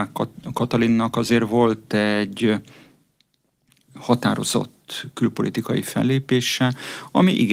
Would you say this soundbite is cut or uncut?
uncut